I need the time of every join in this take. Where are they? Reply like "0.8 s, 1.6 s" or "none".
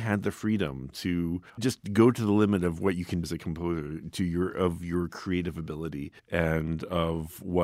1.5 s, 3.2 s, 6.2 s